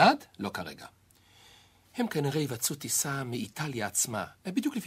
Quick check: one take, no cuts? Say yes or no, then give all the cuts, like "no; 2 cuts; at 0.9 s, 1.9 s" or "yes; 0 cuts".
yes; 0 cuts